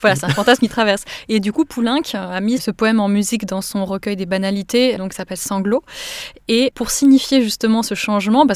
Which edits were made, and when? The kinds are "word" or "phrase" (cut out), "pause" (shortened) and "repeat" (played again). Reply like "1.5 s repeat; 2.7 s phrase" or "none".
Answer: 5.0 s word